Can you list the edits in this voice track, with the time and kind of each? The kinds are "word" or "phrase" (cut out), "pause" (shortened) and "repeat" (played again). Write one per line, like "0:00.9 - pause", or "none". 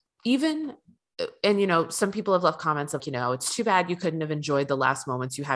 0:03.0 - word